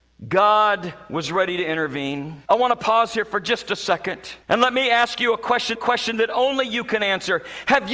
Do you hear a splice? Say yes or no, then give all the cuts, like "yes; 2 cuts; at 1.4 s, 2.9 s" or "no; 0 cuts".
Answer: yes; 3 cuts; at 2.4 s, 4.4 s, 5.7 s